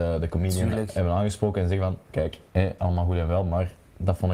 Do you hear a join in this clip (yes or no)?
yes